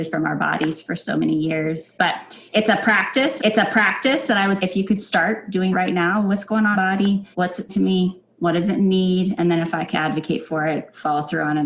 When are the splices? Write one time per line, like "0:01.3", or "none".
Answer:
0:03.4
0:04.6
0:05.7
0:06.7
0:07.3
0:07.7
0:09.9